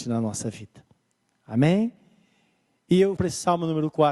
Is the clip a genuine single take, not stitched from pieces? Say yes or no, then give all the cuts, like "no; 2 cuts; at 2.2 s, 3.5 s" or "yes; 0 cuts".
no; 1 cut; at 3.2 s